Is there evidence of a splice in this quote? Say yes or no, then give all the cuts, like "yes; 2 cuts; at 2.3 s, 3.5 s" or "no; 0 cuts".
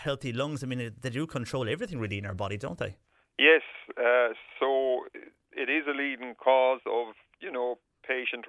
no; 0 cuts